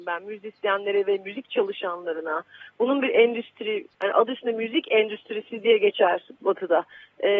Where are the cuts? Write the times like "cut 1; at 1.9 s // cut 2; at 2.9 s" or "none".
cut 1; at 3.9 s